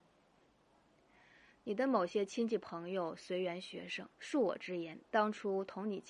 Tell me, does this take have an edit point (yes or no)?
yes